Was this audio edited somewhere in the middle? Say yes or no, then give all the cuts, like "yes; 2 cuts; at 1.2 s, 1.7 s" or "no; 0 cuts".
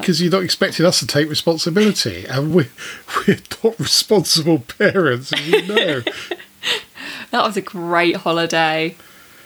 no; 0 cuts